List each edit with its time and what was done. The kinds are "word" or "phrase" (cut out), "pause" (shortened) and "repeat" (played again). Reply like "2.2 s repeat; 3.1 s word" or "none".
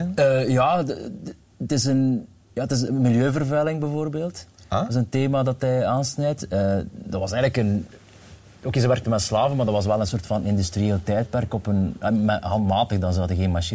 none